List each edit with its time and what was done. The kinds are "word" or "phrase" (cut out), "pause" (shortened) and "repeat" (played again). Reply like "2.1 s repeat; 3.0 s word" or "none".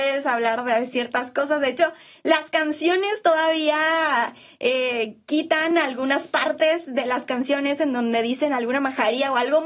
none